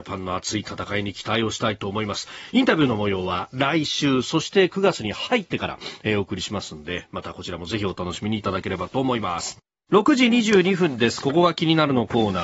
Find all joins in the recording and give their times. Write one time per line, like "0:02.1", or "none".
0:09.8

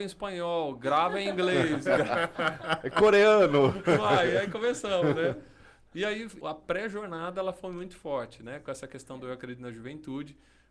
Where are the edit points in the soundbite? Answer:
0:06.4

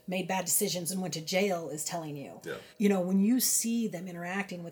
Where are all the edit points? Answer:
0:02.7

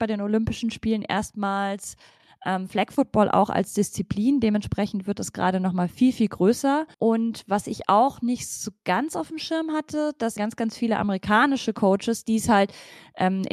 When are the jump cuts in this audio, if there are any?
0:06.9
0:10.4

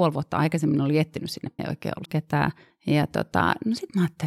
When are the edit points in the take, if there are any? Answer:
0:01.6
0:02.0
0:02.7

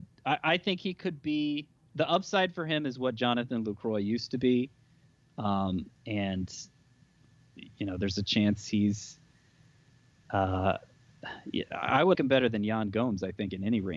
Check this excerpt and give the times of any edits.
0:05.9
0:12.1

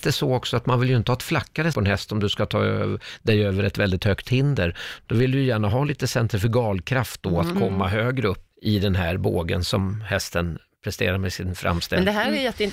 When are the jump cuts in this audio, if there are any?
0:01.7
0:08.5

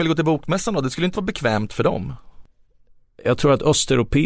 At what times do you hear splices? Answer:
0:01.1

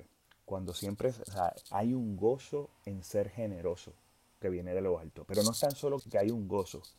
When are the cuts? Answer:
0:01.7
0:04.4
0:06.0

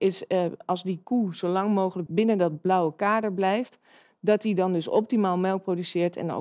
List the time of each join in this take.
0:02.1

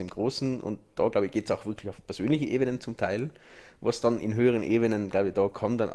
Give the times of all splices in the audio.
none

